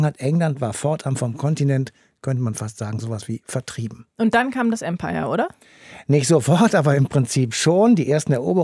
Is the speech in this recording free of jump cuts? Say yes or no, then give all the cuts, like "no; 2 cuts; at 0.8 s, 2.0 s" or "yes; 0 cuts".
yes; 0 cuts